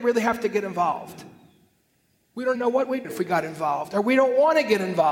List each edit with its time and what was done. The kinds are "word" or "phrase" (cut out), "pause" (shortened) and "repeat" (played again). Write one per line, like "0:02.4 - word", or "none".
0:02.5 - word
0:03.0 - word